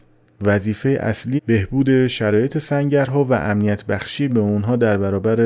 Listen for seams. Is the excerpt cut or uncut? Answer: cut